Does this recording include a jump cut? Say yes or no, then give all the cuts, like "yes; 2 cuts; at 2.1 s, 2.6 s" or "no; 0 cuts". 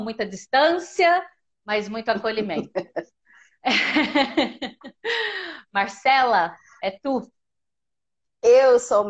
no; 0 cuts